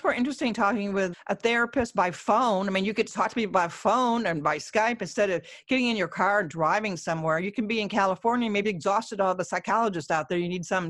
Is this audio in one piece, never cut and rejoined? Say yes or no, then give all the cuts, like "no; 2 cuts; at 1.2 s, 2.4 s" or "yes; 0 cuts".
no; 2 cuts; at 1.1 s, 8.6 s